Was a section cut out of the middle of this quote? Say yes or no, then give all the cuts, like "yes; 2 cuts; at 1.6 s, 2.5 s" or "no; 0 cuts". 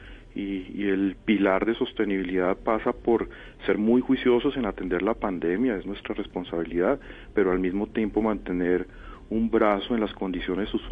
no; 0 cuts